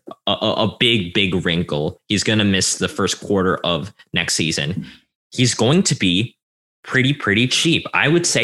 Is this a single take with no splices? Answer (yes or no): yes